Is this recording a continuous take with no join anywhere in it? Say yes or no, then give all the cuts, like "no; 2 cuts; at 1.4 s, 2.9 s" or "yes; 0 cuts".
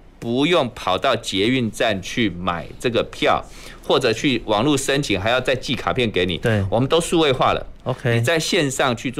yes; 0 cuts